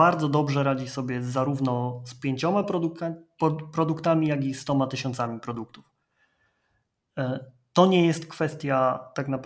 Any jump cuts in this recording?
no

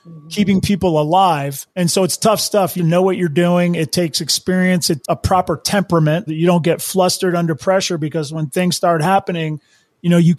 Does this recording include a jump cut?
yes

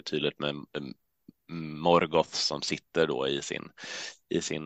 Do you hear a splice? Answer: no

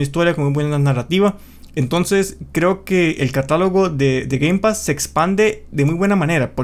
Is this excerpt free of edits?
yes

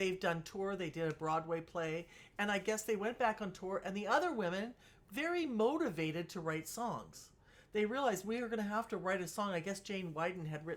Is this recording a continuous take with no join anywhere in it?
yes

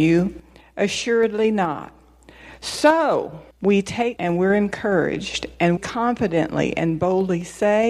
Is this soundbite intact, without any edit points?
no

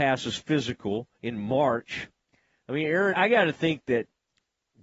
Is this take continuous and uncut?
no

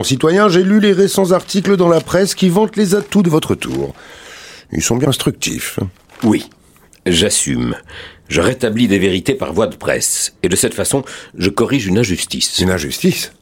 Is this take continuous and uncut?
no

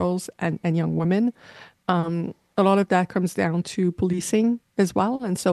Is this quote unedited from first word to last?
yes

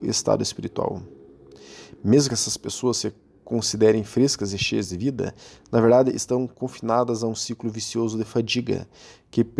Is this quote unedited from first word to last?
yes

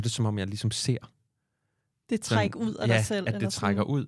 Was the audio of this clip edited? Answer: no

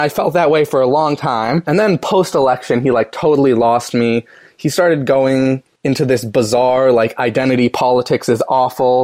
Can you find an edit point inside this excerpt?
no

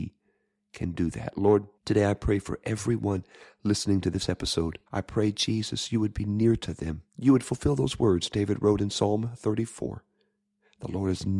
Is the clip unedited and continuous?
no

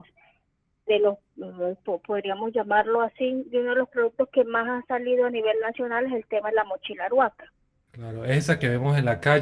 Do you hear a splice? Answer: no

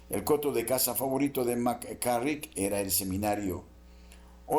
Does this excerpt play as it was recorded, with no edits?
yes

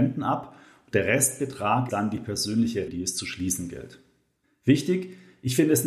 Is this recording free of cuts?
no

